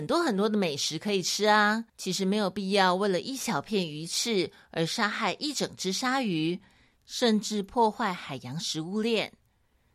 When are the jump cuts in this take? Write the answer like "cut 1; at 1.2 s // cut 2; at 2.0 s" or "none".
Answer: cut 1; at 1.9 s